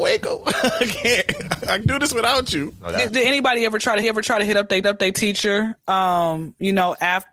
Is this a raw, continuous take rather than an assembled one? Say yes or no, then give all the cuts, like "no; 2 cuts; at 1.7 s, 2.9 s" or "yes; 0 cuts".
no; 4 cuts; at 1.8 s, 3.1 s, 4.0 s, 4.8 s